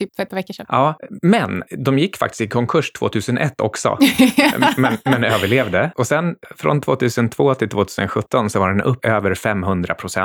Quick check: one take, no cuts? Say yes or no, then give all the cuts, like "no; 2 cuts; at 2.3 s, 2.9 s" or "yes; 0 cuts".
yes; 0 cuts